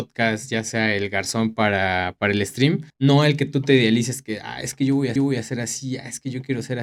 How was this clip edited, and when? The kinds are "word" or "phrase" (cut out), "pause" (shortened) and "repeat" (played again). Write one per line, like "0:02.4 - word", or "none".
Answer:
0:02.9 - pause
0:05.2 - repeat

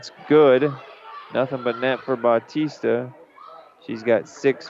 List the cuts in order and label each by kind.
none

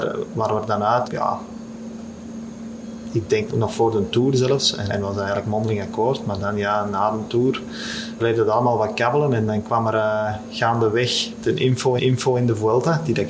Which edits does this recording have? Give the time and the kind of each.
0:01.0 - word
0:03.5 - word
0:04.9 - word
0:08.2 - word
0:12.0 - repeat

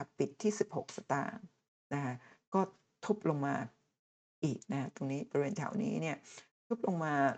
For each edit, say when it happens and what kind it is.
none

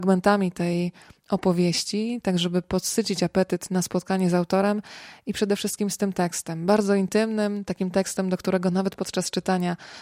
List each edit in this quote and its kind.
none

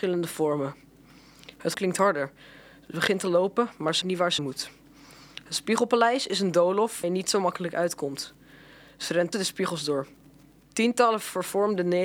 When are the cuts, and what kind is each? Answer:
0:01.7 - word
0:04.0 - word
0:04.4 - word
0:07.0 - word
0:09.3 - word

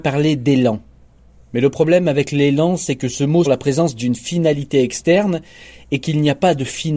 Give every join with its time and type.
0:03.5 - word

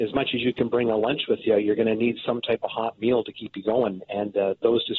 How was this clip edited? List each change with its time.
none

